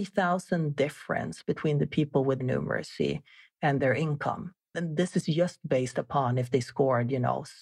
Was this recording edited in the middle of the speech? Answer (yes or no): yes